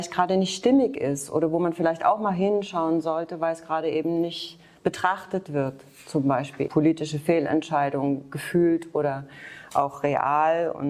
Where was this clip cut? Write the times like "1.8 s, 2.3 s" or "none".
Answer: 6.7 s